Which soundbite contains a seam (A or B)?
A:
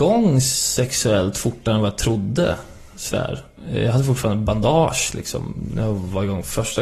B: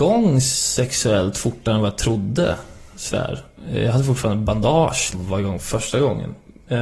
B